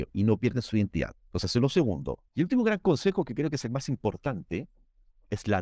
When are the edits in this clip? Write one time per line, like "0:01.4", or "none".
0:01.2
0:02.3